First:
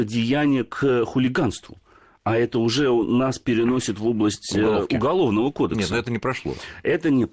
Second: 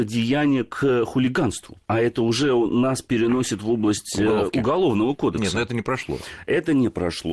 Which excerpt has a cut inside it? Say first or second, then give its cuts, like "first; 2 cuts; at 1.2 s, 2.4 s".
second; 1 cut; at 1.8 s